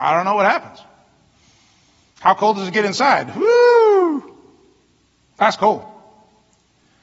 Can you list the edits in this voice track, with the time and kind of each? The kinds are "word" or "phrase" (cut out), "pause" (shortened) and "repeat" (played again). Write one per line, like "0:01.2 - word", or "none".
none